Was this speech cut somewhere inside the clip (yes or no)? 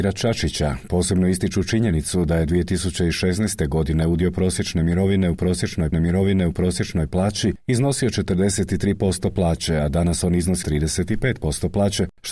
yes